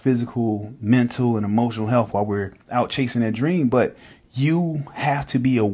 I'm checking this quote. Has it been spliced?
no; 0 cuts

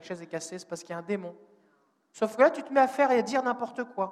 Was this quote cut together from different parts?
no; 0 cuts

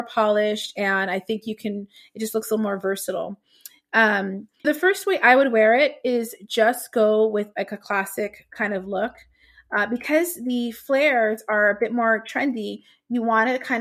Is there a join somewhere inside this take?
yes; 1 cut; at 4.6 s

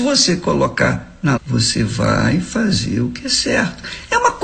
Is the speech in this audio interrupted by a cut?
yes; 1 cut; at 1.4 s

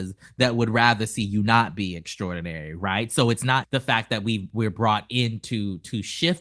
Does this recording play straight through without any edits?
no; 1 cut; at 3.6 s

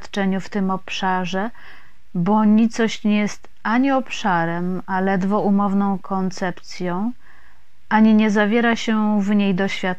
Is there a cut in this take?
no; 0 cuts

